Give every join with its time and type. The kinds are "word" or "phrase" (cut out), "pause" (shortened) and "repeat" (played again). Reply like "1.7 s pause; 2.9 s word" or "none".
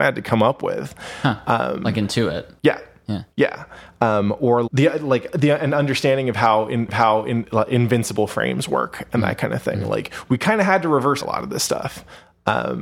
2.6 s pause; 3.3 s pause; 4.7 s word; 6.9 s repeat; 11.2 s word